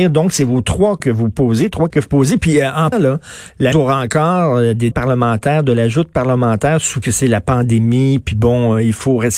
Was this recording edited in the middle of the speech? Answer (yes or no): yes